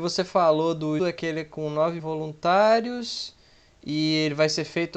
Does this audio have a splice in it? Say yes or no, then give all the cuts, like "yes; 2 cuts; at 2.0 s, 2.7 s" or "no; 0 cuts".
yes; 2 cuts; at 1.0 s, 2.0 s